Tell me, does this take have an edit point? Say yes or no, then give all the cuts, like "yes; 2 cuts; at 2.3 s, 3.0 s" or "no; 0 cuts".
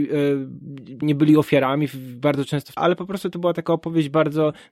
yes; 2 cuts; at 1.0 s, 2.8 s